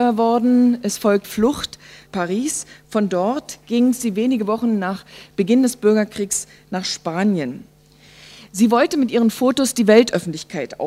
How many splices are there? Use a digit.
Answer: 2